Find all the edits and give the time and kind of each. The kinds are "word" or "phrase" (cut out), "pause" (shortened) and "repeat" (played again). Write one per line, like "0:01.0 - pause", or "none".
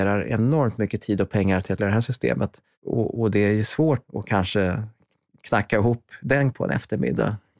0:01.8 - word
0:04.0 - word
0:06.5 - word